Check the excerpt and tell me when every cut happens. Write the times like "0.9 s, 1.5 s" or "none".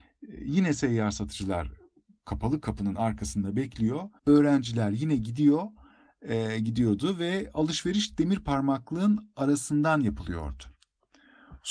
4.2 s